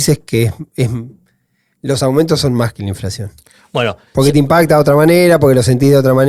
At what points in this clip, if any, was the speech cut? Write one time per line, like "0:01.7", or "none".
none